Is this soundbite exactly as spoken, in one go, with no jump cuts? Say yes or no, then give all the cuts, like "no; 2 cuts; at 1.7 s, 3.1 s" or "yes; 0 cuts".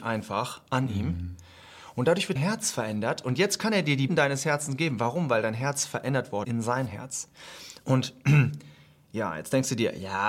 no; 3 cuts; at 2.4 s, 4.1 s, 6.4 s